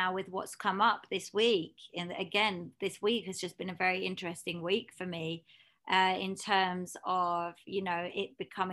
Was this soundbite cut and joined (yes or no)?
no